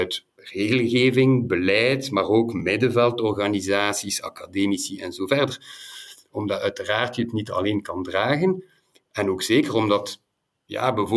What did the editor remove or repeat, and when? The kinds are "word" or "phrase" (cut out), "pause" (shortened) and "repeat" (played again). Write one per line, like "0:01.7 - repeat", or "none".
none